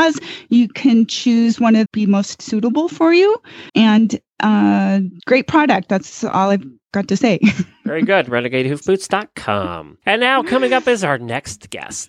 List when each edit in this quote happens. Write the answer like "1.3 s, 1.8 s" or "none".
1.9 s, 3.7 s, 5.2 s, 10.0 s

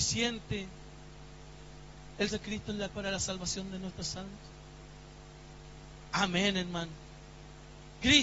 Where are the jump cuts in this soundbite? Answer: 2.3 s, 2.9 s

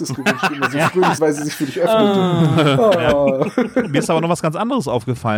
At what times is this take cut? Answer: 1.2 s

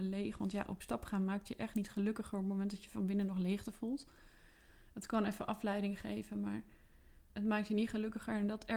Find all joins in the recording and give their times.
none

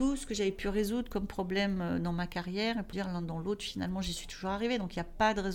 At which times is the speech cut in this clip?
2.9 s

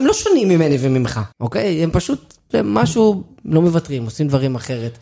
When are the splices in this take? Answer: 1.3 s, 2.5 s

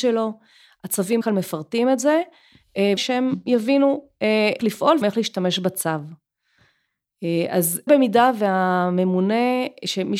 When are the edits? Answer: 1.2 s, 3.0 s, 4.6 s, 5.0 s, 7.9 s

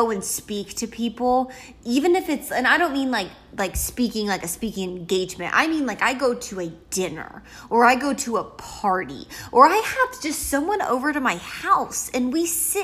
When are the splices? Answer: none

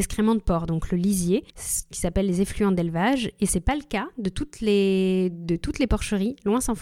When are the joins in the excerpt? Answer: 1.5 s

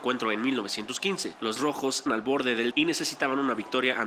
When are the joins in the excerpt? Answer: 1.6 s, 2.1 s, 2.7 s

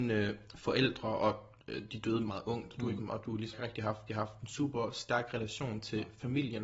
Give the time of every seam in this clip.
2.3 s, 3.0 s, 3.5 s, 4.1 s

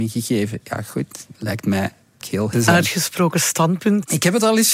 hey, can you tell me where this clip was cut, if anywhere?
1.3 s, 2.2 s, 2.5 s

